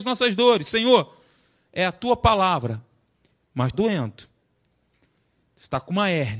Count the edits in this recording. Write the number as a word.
one